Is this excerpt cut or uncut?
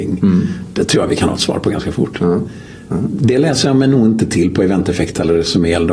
uncut